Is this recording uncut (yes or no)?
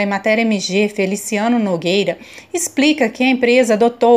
yes